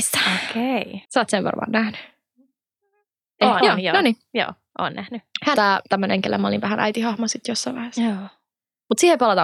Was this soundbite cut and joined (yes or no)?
yes